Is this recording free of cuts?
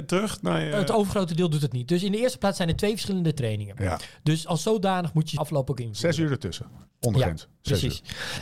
no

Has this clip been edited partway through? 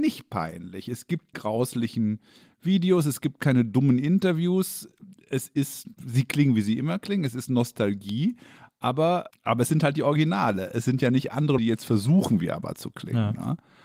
yes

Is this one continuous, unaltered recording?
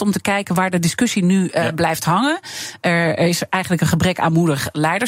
yes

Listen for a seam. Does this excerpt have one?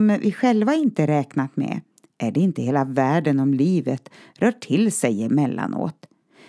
no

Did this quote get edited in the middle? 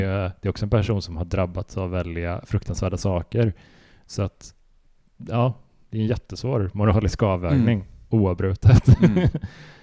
no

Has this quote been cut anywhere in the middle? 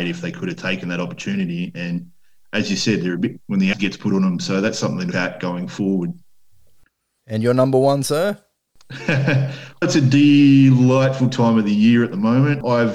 yes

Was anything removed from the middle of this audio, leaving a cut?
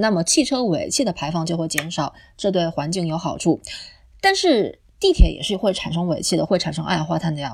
no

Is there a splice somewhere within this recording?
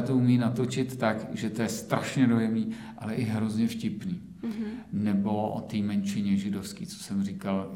no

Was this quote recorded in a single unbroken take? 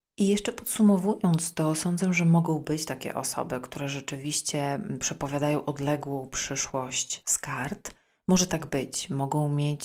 yes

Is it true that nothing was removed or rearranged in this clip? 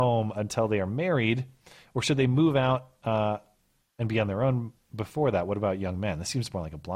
yes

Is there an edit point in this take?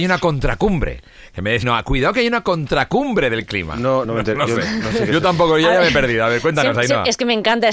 yes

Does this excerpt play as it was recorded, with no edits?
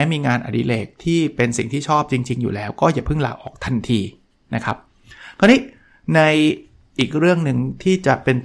yes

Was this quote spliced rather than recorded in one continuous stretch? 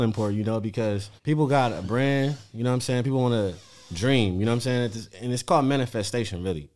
yes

